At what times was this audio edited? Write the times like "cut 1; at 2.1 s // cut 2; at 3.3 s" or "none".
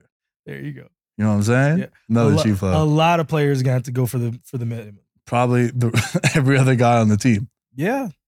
none